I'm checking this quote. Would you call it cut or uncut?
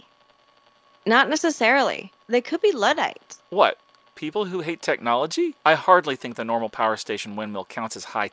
cut